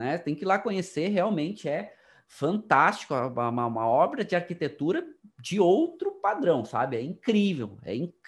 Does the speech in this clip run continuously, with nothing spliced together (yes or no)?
yes